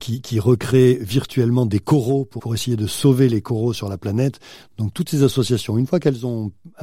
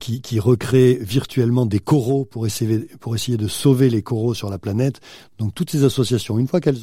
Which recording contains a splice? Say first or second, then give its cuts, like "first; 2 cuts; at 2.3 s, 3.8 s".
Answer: first; 1 cut; at 2.4 s